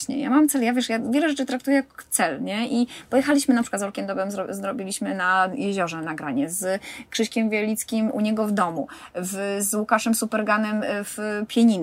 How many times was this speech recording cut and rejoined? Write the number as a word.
zero